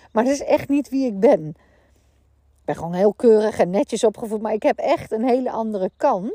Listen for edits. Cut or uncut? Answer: uncut